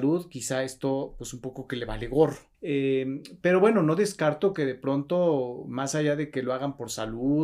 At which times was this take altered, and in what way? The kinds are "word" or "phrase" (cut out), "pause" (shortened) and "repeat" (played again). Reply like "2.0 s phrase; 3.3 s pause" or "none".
2.5 s pause